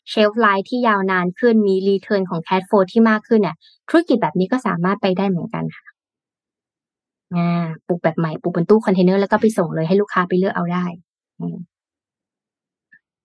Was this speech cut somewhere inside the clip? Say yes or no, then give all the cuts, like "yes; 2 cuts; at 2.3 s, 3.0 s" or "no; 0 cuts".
no; 0 cuts